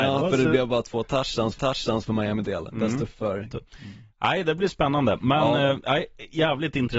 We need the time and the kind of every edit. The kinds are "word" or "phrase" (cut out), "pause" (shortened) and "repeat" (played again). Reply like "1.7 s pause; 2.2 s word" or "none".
1.6 s repeat; 2.4 s word; 3.1 s word; 3.5 s phrase